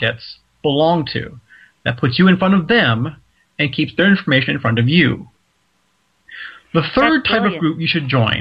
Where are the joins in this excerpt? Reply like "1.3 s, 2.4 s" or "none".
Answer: none